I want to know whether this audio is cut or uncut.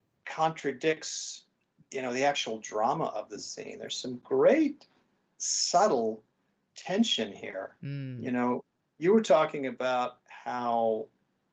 uncut